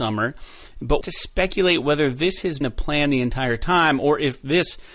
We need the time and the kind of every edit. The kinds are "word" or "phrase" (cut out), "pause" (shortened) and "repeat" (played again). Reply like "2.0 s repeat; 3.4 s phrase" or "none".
1.0 s phrase; 2.6 s word